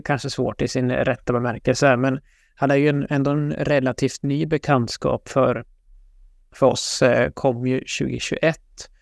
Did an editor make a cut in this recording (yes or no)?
no